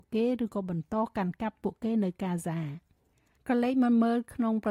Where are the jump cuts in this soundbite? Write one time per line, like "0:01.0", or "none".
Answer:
none